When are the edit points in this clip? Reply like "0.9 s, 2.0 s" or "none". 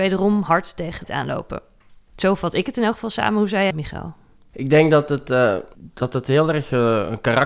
1.0 s, 3.7 s